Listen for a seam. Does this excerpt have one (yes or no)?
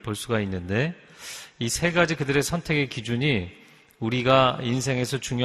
no